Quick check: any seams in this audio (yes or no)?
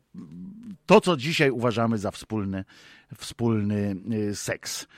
no